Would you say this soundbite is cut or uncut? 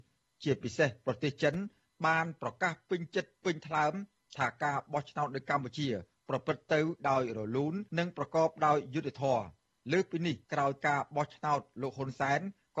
cut